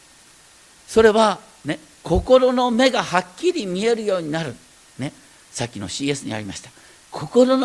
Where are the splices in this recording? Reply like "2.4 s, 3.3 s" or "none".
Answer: none